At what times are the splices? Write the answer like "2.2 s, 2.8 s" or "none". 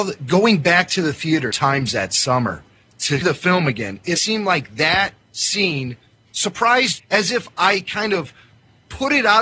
1.5 s, 3.2 s, 4.2 s, 7.0 s